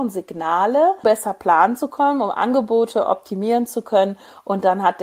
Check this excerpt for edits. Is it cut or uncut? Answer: cut